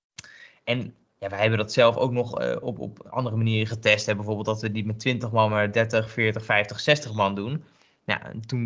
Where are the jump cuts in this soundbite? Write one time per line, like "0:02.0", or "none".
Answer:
none